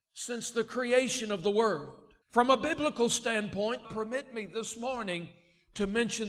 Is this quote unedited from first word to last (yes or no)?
no